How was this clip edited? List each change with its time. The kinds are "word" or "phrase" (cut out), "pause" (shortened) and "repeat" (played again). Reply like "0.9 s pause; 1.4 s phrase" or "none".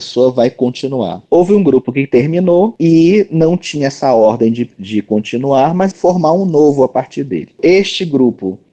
1.3 s pause; 5.9 s phrase

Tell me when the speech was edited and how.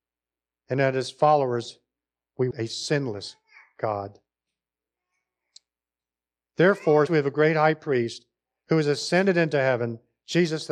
2.5 s word; 7.1 s word

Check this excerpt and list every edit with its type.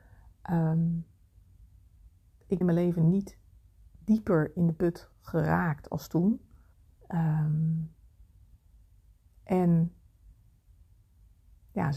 2.6 s word; 5.1 s pause; 6.7 s pause

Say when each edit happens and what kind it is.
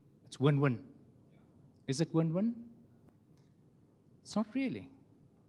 none

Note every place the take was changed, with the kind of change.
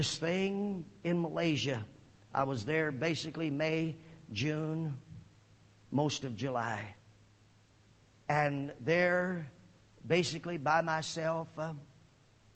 none

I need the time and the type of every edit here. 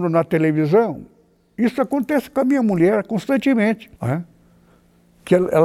4.0 s pause

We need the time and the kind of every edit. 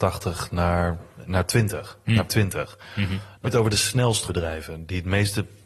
1.2 s word; 2.3 s word; 3.4 s word; 4.3 s word

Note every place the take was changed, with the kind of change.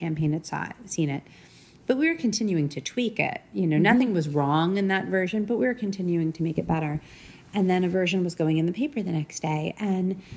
none

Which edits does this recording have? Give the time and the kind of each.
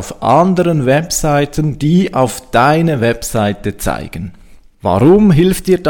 none

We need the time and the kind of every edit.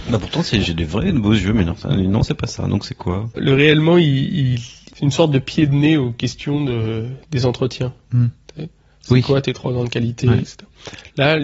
none

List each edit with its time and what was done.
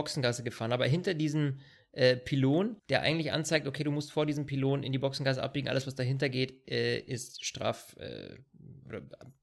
2.8 s pause

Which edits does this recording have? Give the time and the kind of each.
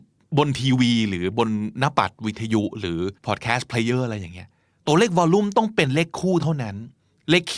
3.2 s pause

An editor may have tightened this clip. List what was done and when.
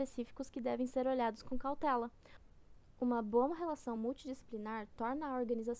none

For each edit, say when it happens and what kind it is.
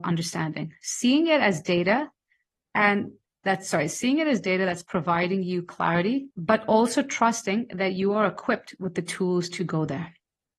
6.3 s pause

